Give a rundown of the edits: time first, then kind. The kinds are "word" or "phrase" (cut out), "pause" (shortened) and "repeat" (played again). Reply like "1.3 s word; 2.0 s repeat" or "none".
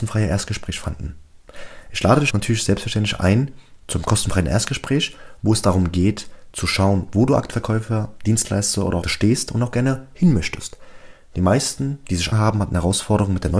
2.3 s word; 3.8 s pause; 7.5 s word; 9.0 s word; 12.3 s word